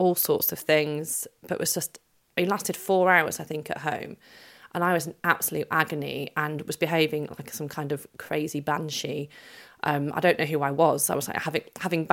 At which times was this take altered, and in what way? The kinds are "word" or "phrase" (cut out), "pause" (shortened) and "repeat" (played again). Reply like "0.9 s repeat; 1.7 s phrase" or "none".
none